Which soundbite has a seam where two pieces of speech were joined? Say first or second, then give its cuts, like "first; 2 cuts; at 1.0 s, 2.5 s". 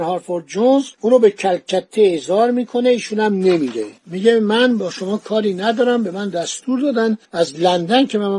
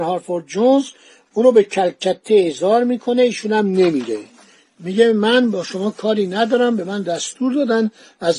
first; 3 cuts; at 0.9 s, 4.0 s, 7.2 s